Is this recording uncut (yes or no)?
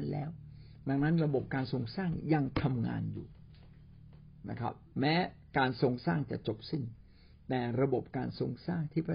yes